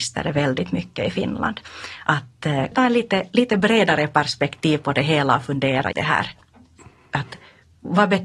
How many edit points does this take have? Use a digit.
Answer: 2